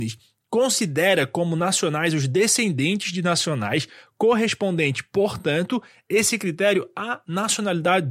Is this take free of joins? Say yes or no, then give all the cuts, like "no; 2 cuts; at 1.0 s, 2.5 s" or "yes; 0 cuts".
yes; 0 cuts